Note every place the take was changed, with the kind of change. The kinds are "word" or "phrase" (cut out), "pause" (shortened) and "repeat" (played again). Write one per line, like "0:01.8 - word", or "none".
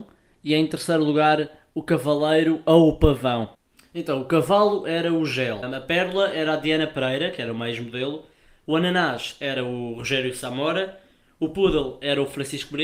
none